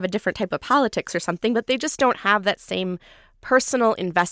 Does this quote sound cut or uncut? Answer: uncut